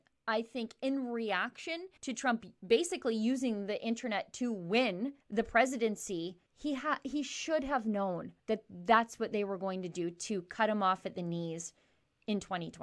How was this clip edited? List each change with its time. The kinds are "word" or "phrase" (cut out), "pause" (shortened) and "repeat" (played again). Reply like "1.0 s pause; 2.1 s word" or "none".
2.0 s pause; 5.2 s pause; 6.5 s pause; 8.4 s pause